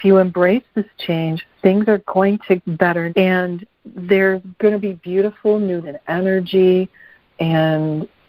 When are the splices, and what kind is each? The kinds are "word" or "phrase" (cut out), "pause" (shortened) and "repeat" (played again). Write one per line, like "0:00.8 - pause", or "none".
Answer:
0:02.6 - word
0:03.1 - word
0:04.6 - pause
0:05.8 - word